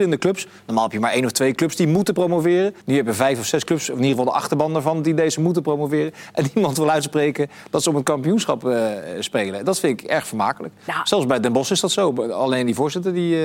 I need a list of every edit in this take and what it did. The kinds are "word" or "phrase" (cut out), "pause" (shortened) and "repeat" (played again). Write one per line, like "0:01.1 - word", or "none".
0:02.8 - pause